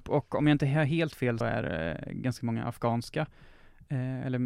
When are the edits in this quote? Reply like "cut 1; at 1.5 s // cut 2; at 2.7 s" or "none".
cut 1; at 1.4 s

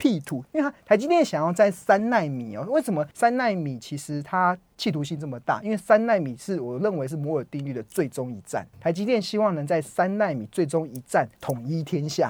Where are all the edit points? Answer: cut 1; at 3.1 s // cut 2; at 8.7 s // cut 3; at 11.4 s

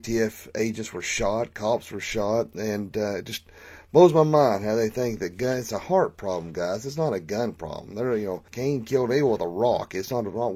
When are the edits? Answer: cut 1; at 8.5 s

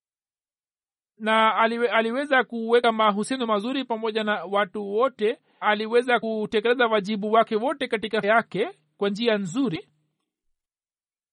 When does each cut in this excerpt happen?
cut 1; at 5.6 s // cut 2; at 8.2 s

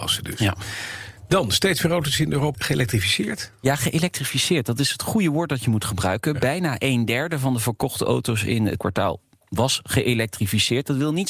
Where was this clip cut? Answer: cut 1; at 2.5 s // cut 2; at 8.8 s

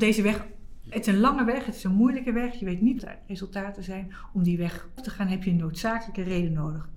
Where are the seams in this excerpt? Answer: cut 1; at 3.0 s // cut 2; at 5.0 s

